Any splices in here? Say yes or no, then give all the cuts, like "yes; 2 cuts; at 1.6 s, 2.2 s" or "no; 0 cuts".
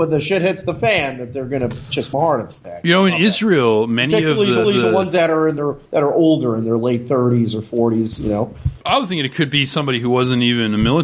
yes; 4 cuts; at 2.1 s, 4.6 s, 5.9 s, 8.8 s